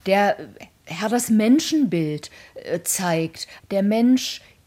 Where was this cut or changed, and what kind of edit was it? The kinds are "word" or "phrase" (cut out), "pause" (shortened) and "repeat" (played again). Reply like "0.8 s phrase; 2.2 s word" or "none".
none